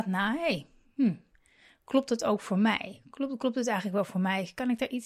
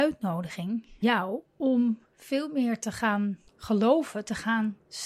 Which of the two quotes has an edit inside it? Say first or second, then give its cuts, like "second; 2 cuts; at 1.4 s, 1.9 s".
second; 3 cuts; at 1.0 s, 1.4 s, 3.5 s